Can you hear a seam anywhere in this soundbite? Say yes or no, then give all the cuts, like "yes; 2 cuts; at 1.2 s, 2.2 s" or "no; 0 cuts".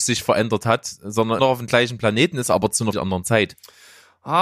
yes; 2 cuts; at 1.4 s, 2.9 s